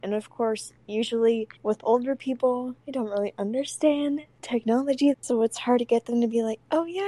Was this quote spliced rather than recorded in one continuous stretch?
yes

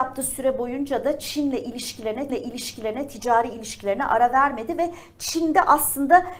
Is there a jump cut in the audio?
yes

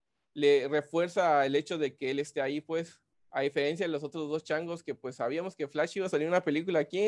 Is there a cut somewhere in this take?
yes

